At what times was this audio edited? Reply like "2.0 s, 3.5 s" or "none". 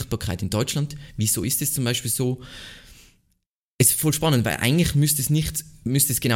none

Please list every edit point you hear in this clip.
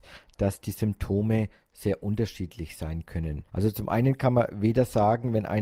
3.5 s

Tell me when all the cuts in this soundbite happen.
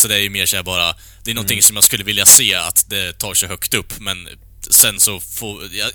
none

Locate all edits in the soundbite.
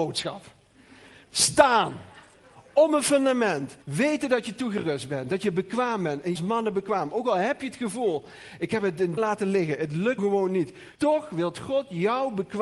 1.2 s, 3.8 s, 6.3 s, 9.2 s, 10.2 s, 10.9 s

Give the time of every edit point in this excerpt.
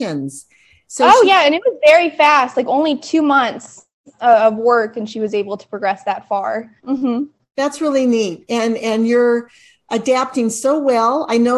6.8 s

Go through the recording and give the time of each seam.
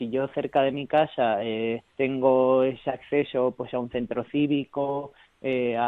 1.9 s

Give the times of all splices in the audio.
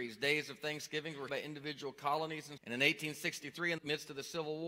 1.3 s, 2.6 s, 3.8 s

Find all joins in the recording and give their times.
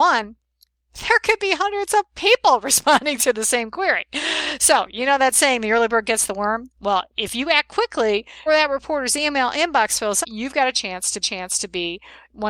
8.5 s, 10.2 s, 11.2 s

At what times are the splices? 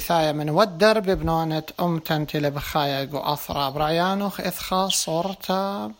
none

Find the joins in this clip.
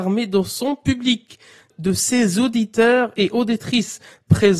none

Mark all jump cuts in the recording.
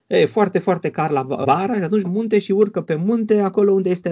1.4 s, 2.0 s

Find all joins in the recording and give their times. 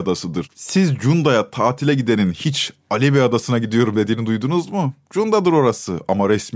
none

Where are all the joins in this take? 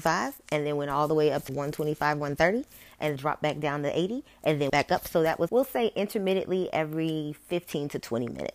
1.5 s, 3.2 s, 4.7 s, 5.5 s

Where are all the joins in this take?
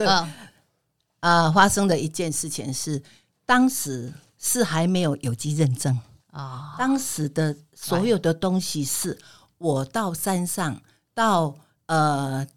none

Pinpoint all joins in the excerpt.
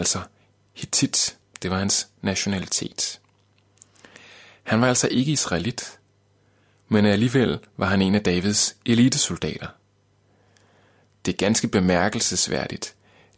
none

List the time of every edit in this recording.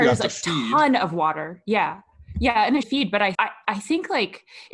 2.8 s, 3.3 s

